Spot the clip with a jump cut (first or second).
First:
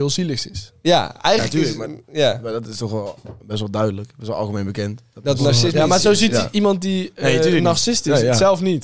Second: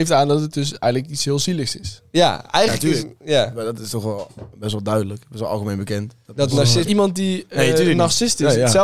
second